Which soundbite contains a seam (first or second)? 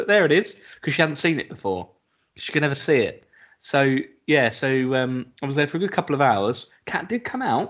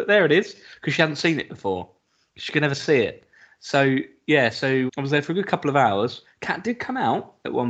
second